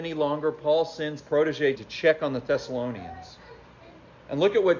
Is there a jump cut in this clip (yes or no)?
yes